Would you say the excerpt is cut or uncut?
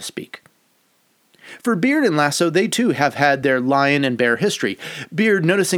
uncut